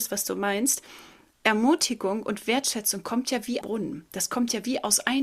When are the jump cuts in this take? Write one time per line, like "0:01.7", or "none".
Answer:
0:03.6